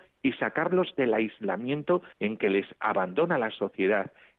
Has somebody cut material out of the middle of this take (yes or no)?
yes